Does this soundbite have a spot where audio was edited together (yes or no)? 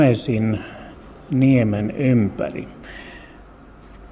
no